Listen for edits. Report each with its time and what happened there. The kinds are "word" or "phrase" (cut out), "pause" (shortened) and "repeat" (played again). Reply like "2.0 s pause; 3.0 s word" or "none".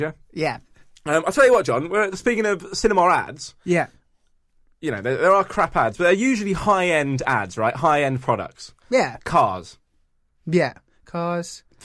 none